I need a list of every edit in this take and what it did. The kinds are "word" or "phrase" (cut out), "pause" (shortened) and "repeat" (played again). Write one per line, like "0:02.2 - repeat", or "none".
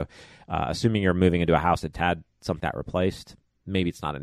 0:01.9 - word
0:02.6 - word